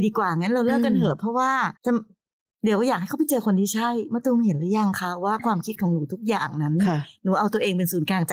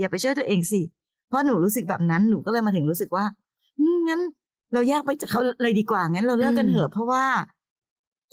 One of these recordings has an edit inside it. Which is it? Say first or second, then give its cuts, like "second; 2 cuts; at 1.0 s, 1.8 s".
first; 1 cut; at 1.8 s